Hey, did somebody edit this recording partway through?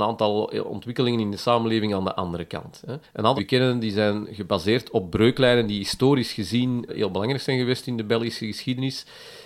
yes; 3 cuts; at 3.0 s, 3.4 s, 6.9 s

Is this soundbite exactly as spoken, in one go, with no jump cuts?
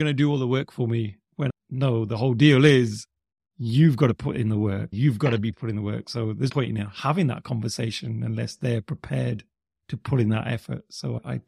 no; 4 cuts; at 1.5 s, 4.9 s, 5.5 s, 6.5 s

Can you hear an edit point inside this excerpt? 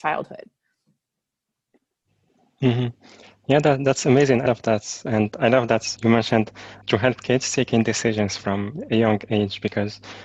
yes; 3 cuts; at 4.5 s, 6.0 s, 6.8 s

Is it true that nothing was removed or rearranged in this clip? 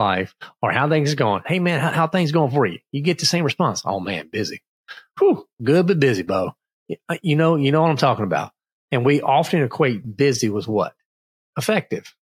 yes; 0 cuts

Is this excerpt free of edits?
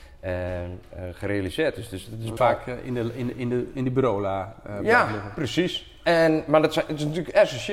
no; 1 cut; at 2.4 s

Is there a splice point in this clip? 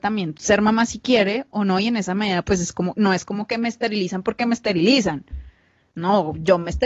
no; 0 cuts

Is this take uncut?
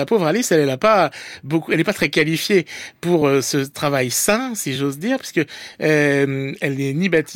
yes; 0 cuts

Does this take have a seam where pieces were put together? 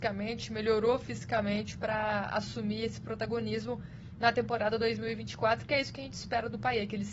no; 0 cuts

